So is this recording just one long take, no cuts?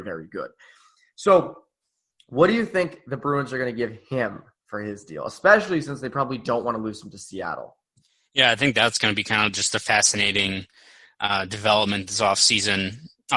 yes; 0 cuts

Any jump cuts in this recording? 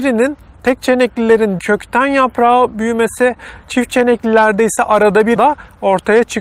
yes; 2 cuts; at 1.6 s, 5.4 s

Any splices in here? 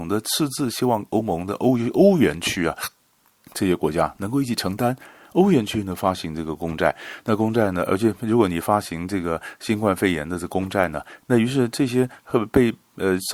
no; 0 cuts

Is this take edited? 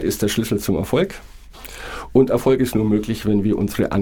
no; 0 cuts

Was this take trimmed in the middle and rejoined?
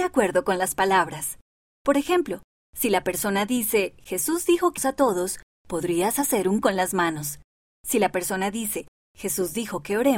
yes; 2 cuts; at 4.8 s, 6.6 s

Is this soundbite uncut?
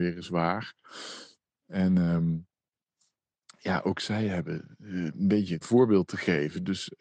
no; 1 cut; at 5.6 s

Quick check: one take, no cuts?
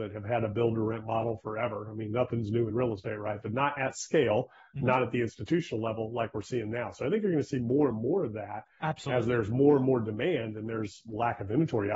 yes; 0 cuts

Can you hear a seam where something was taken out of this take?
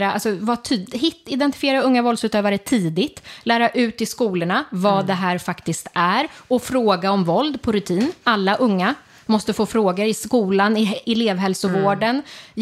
no; 0 cuts

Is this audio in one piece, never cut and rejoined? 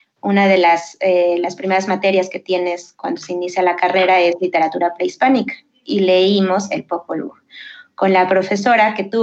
yes; 0 cuts

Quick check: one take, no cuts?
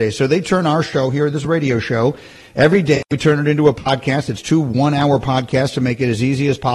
yes; 0 cuts

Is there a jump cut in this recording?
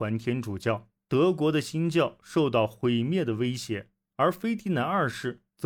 yes; 1 cut; at 1.0 s

